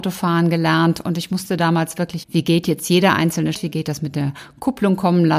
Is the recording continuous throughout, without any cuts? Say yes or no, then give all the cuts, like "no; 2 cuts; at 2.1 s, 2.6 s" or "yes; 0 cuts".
no; 2 cuts; at 2.2 s, 3.5 s